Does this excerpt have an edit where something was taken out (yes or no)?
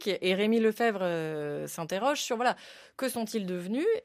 no